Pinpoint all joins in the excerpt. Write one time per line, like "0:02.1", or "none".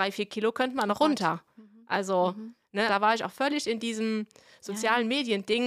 0:02.9